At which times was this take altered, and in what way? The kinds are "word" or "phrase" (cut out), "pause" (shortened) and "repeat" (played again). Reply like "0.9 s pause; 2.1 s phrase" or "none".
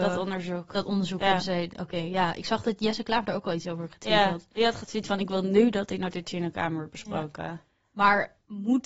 none